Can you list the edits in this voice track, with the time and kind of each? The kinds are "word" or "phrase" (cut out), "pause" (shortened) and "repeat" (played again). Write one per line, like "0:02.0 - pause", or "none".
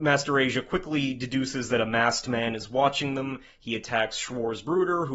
none